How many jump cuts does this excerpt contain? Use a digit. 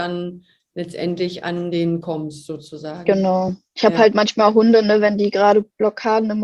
1